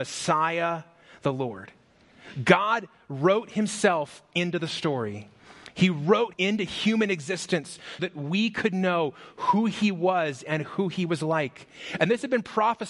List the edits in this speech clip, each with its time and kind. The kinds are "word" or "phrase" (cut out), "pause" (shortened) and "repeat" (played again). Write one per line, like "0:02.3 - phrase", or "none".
0:06.3 - word
0:08.0 - word